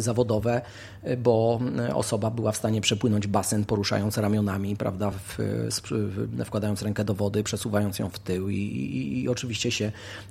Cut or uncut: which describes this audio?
uncut